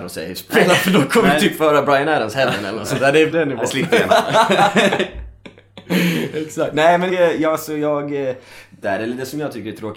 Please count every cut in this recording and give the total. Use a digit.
3